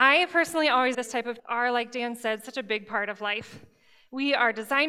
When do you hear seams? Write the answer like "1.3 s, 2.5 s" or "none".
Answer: 0.9 s, 1.4 s